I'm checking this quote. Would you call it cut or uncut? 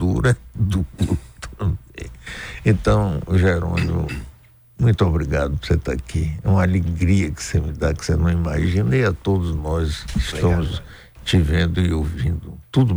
uncut